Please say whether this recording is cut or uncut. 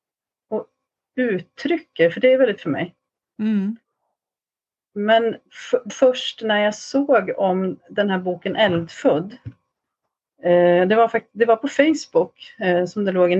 cut